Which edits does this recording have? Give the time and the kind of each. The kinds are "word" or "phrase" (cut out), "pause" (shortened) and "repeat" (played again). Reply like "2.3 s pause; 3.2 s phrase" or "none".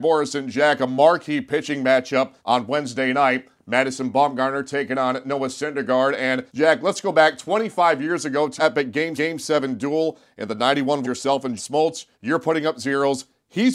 2.4 s pause; 6.5 s pause; 8.6 s word; 9.2 s repeat; 11.0 s phrase; 11.6 s word; 12.1 s pause